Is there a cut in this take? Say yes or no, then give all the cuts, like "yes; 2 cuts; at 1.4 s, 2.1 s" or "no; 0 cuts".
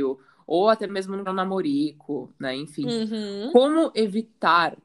yes; 1 cut; at 1.3 s